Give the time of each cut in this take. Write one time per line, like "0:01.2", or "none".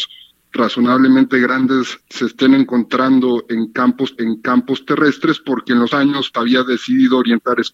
0:02.0
0:04.2
0:05.9
0:06.3